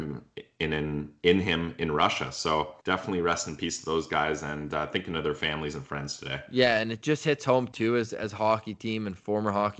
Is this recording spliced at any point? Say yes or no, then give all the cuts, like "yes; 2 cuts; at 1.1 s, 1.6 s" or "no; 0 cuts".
yes; 1 cut; at 2.8 s